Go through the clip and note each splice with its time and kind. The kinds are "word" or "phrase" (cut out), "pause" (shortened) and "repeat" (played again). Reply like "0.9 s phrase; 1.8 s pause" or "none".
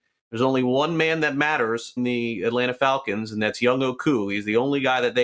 2.0 s word